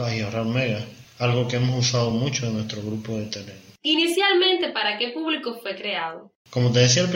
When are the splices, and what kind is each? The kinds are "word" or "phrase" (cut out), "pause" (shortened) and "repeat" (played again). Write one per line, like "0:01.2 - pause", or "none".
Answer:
none